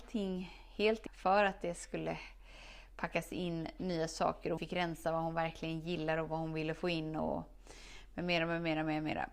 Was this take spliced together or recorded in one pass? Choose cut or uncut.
cut